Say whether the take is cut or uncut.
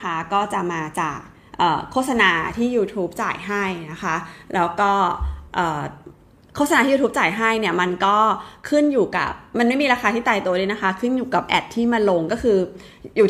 uncut